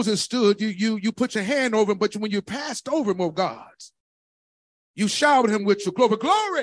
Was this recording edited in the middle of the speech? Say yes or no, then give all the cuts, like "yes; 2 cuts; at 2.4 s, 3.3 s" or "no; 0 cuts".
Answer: no; 0 cuts